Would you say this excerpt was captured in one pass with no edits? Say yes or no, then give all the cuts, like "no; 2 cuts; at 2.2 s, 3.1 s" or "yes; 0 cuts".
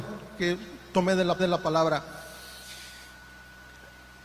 no; 1 cut; at 1.4 s